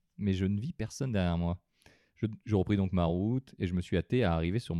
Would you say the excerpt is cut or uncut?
uncut